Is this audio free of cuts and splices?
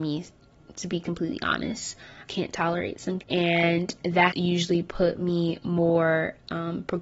no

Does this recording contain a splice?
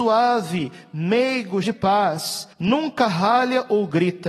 yes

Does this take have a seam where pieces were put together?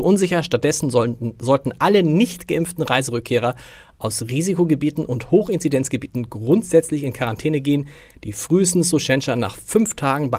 no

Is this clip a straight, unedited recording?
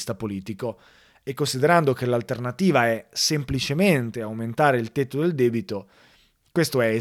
yes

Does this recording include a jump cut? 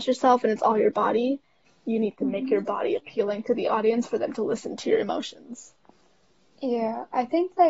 no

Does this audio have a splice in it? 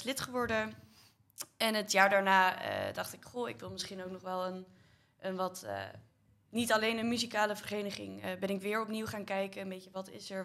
no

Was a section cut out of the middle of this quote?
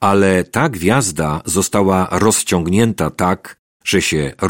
no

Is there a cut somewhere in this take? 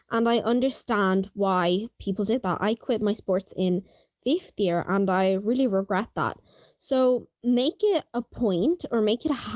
no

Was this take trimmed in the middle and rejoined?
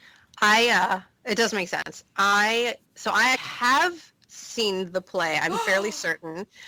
yes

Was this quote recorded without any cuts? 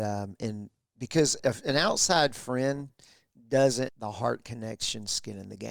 no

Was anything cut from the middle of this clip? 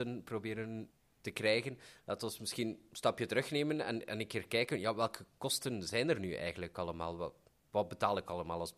no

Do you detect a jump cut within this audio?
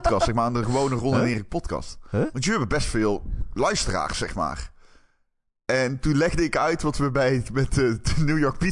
no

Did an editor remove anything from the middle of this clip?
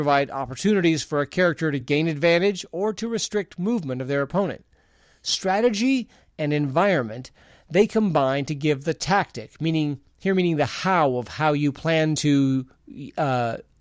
no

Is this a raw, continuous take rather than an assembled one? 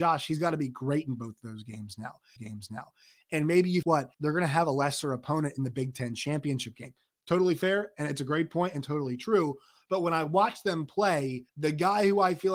no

